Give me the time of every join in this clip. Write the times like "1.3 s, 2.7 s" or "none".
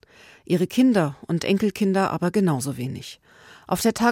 none

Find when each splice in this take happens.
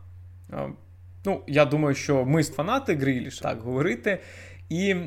2.5 s, 3.4 s

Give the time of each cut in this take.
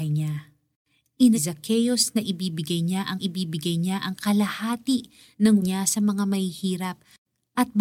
1.3 s, 3.2 s, 5.6 s

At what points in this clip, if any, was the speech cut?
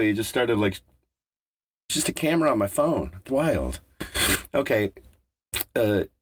1.9 s, 3.3 s

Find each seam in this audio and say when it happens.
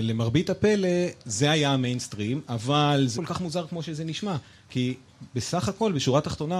3.2 s

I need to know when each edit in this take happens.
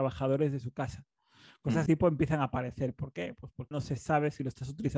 1.9 s, 3.7 s

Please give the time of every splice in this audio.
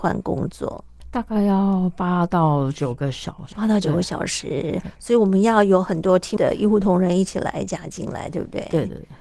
3.5 s, 6.4 s

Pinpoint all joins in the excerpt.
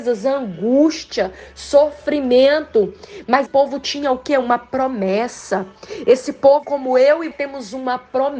3.5 s, 6.6 s, 7.3 s

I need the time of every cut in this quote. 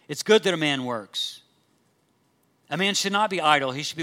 none

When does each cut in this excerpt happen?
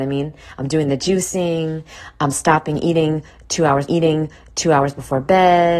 3.9 s

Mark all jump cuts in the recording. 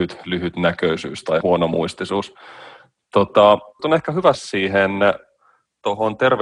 1.4 s, 3.8 s, 4.3 s

